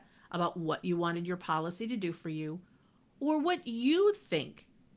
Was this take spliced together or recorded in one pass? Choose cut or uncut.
uncut